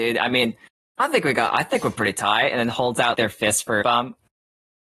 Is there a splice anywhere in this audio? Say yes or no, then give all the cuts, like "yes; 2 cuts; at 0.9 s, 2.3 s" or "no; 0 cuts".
yes; 2 cuts; at 3.1 s, 3.8 s